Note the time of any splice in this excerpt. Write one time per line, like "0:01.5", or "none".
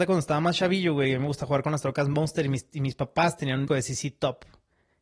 0:03.7